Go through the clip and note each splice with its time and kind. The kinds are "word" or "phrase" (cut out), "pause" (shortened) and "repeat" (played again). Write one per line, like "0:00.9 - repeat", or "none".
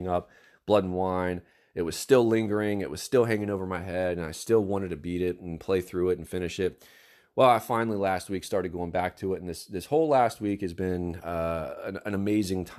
none

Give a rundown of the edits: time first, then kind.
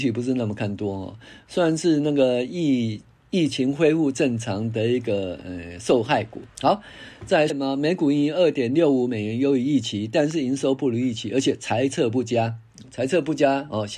0:06.5 - pause
0:07.5 - word

